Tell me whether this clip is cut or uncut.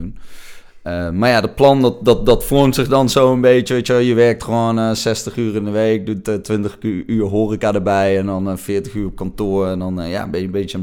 uncut